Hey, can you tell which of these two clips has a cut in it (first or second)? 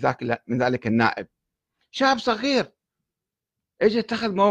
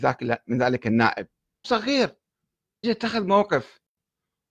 second